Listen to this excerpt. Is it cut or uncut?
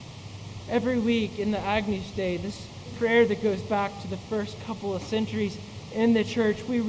cut